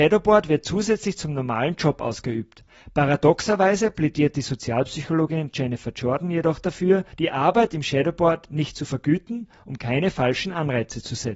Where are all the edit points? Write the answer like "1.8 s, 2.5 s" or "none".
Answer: 7.1 s